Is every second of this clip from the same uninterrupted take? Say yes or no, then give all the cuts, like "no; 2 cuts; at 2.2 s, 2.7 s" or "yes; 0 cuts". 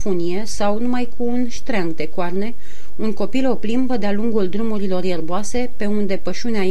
yes; 0 cuts